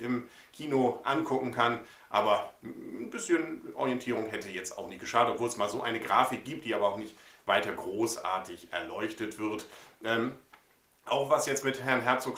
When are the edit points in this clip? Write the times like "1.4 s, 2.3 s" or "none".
none